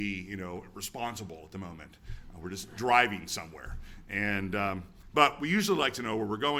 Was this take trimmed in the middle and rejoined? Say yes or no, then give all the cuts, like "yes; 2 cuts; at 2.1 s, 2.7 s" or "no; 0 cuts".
no; 0 cuts